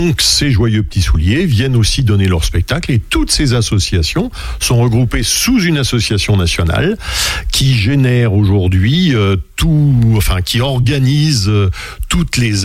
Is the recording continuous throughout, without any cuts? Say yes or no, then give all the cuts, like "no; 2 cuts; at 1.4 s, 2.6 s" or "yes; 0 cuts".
yes; 0 cuts